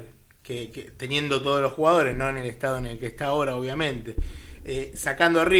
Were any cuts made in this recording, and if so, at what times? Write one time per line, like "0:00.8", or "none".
none